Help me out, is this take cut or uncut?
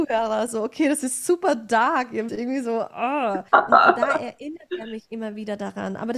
cut